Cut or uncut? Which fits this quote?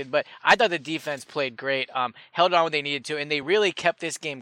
uncut